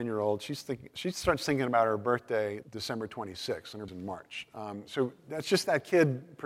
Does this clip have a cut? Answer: yes; 2 cuts; at 2.6 s, 3.9 s

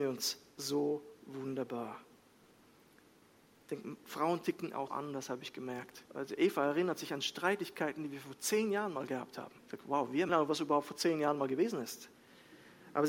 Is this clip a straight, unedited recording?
no; 4 cuts; at 4.9 s, 6.1 s, 9.6 s, 10.3 s

